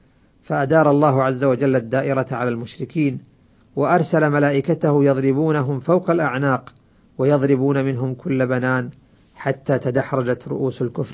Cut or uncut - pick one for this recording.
uncut